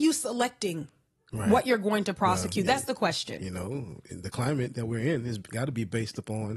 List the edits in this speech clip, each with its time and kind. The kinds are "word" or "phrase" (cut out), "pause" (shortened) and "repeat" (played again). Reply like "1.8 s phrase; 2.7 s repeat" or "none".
none